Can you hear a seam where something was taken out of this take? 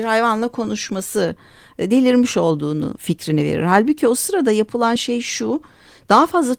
no; 0 cuts

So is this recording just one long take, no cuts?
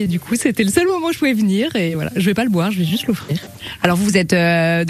yes; 0 cuts

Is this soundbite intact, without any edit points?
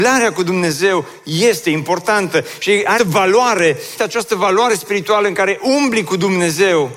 no; 2 cuts; at 3.0 s, 4.0 s

